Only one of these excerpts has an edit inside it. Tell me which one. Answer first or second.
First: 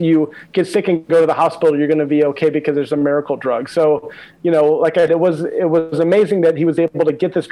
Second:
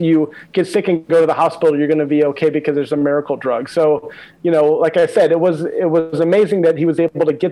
first